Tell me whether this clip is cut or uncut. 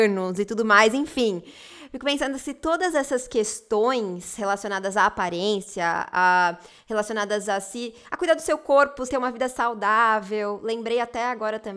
cut